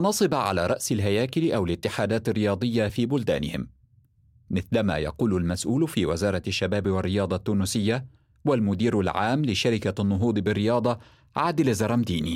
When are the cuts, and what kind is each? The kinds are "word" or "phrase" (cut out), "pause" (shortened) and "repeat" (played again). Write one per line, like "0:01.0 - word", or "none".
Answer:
none

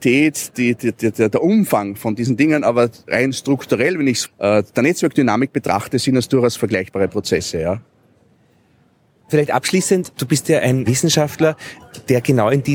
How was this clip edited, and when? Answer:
0:04.3 - phrase

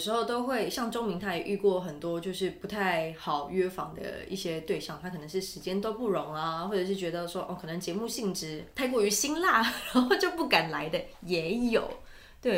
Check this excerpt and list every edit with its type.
none

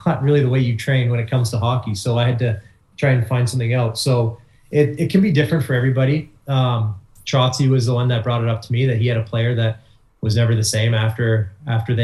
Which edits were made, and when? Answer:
none

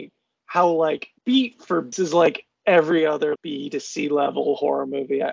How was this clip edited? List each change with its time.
0:01.2 - pause
0:01.9 - phrase
0:03.4 - word

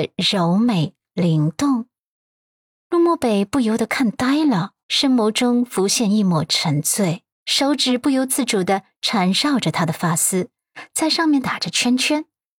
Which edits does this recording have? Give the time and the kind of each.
0:04.8 - pause
0:07.3 - pause

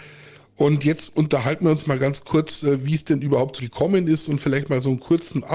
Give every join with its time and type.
0:03.6 - word

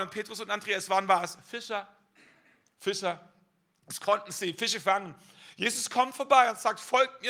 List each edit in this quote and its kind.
none

